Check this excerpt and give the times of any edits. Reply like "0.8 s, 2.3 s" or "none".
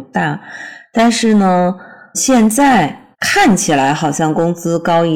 2.1 s, 3.1 s